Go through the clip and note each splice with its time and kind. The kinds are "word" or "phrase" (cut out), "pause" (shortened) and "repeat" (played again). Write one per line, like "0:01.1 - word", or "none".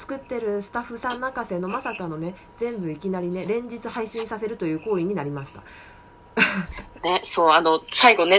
none